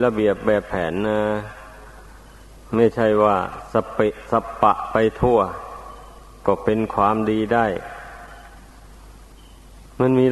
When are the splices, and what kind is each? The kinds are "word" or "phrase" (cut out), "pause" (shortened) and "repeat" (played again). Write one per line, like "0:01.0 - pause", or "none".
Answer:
none